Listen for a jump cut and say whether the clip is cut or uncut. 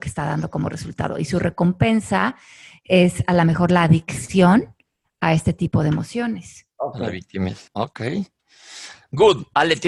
cut